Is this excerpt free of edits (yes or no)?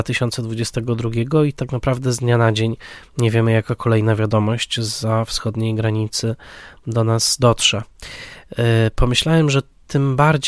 yes